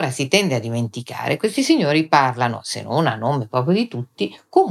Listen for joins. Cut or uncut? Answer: uncut